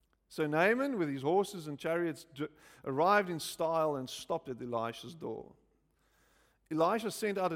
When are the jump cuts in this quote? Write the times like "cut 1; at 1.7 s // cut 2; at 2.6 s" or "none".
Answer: none